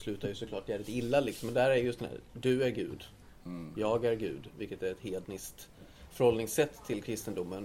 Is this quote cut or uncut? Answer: uncut